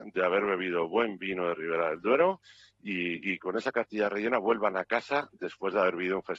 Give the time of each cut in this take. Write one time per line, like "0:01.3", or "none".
none